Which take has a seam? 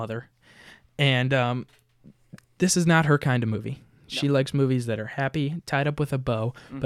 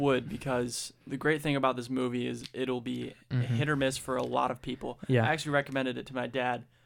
second; 1 cut; at 1.0 s

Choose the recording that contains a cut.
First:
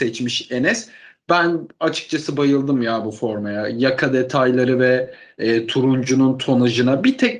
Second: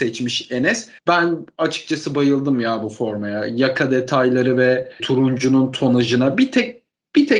second; 2 cuts; at 1.0 s, 5.0 s

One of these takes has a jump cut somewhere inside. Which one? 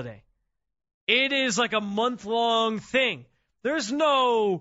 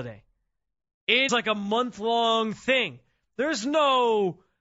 second; 1 cut; at 1.3 s

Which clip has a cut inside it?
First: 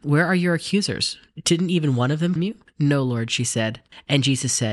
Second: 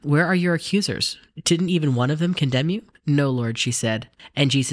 first; 1 cut; at 2.4 s

